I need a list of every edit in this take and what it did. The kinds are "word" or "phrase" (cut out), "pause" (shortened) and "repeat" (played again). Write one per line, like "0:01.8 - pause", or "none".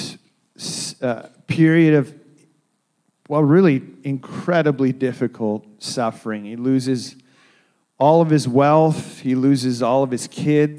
none